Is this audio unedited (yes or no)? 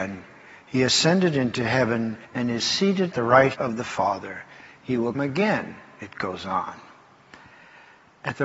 no